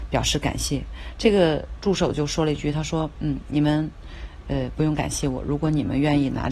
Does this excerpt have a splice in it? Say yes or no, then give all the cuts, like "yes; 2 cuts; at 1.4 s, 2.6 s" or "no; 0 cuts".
no; 0 cuts